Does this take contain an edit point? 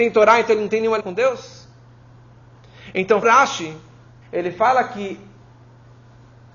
yes; 3 cuts; at 1.0 s, 3.2 s, 4.2 s

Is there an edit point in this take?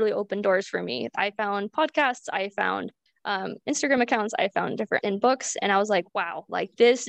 yes; 3 cuts; at 3.1 s, 5.0 s, 6.1 s

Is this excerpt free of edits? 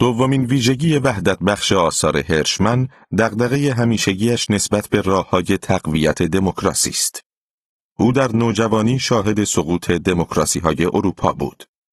yes; 0 cuts

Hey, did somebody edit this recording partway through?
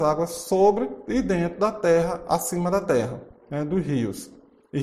no; 0 cuts

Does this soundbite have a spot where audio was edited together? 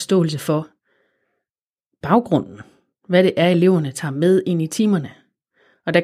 no; 0 cuts

